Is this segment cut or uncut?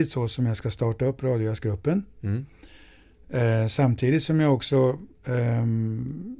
uncut